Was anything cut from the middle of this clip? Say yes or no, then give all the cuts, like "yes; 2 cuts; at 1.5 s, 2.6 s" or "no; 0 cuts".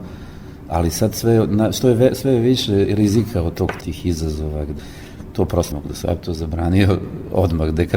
yes; 2 cuts; at 3.8 s, 5.7 s